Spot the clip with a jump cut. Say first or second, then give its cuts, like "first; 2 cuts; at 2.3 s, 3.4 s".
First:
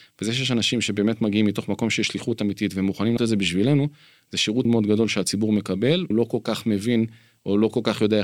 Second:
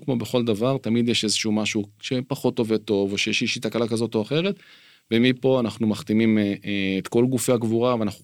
first; 3 cuts; at 3.2 s, 4.6 s, 6.1 s